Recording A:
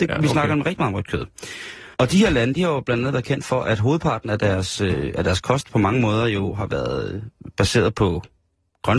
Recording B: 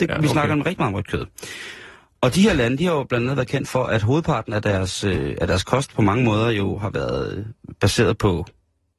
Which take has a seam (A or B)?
A